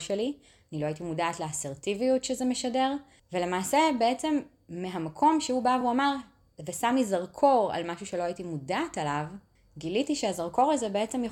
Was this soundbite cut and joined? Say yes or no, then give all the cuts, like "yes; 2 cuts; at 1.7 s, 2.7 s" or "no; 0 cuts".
no; 0 cuts